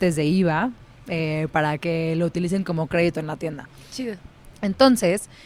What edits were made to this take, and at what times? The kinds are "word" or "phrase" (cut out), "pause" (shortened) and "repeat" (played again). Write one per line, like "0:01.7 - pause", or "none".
none